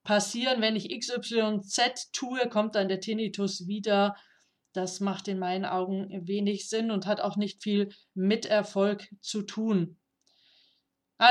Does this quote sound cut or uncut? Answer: uncut